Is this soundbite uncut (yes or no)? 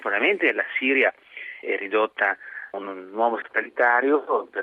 no